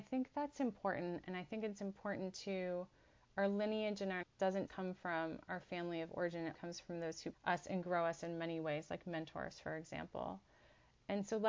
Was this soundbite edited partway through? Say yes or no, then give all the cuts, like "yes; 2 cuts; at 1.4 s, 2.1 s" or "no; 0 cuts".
yes; 4 cuts; at 4.2 s, 4.7 s, 6.5 s, 7.3 s